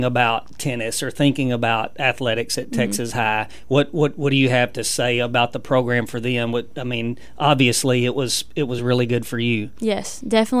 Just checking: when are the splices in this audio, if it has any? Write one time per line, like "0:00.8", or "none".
none